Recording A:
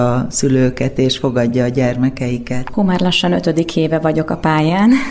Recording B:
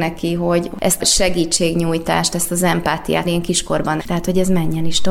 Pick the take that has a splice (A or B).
B